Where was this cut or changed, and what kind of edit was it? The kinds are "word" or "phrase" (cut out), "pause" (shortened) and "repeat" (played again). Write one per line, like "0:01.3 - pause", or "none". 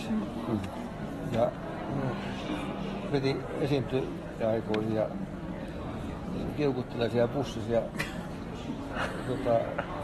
0:03.1 - word
0:04.4 - phrase
0:06.5 - phrase